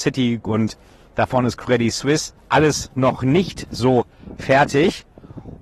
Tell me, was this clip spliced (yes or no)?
yes